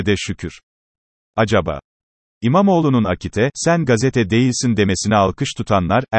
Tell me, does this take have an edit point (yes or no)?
no